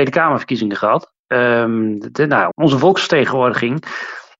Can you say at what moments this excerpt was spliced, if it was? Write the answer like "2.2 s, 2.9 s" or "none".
2.5 s